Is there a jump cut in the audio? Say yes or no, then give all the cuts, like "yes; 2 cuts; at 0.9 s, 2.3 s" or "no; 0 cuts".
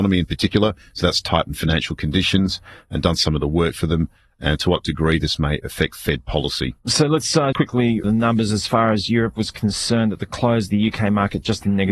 yes; 2 cuts; at 7.5 s, 8.0 s